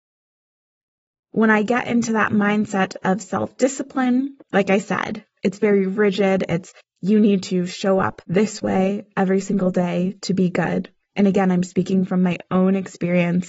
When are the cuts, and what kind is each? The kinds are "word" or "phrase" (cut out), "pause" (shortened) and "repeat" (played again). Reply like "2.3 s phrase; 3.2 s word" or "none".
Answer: 4.4 s pause; 6.8 s pause; 8.2 s pause